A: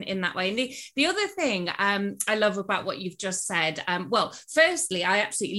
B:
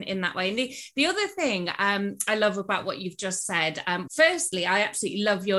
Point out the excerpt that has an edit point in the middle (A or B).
B